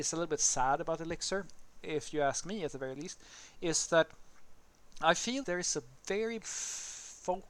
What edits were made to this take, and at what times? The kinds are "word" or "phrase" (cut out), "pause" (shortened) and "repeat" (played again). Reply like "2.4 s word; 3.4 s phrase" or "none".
5.4 s word; 6.4 s word